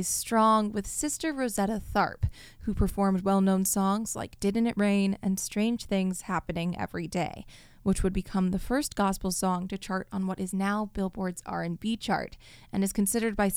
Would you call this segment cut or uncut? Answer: uncut